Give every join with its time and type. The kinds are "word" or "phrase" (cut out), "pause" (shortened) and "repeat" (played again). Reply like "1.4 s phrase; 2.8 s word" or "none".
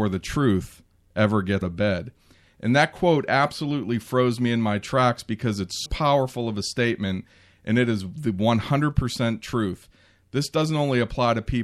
1.6 s word; 5.9 s word